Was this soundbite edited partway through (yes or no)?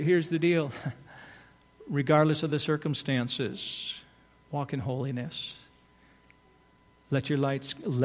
no